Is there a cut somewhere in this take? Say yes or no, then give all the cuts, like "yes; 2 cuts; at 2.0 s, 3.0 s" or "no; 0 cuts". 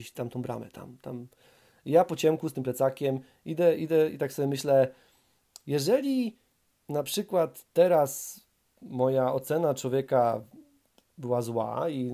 no; 0 cuts